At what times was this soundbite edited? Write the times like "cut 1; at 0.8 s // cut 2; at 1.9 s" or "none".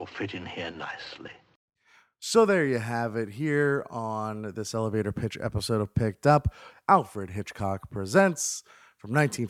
none